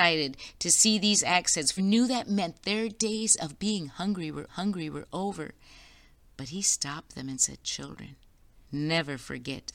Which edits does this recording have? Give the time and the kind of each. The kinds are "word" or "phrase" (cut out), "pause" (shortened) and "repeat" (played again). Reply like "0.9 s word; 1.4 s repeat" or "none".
1.8 s word; 4.5 s repeat; 8.6 s pause